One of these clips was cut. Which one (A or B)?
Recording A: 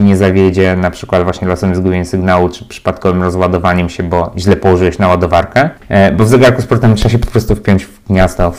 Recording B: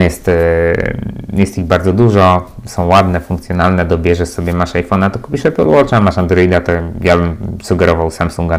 A